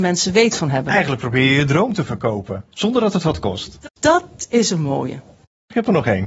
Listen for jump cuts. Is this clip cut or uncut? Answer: uncut